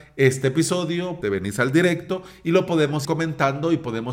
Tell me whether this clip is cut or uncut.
cut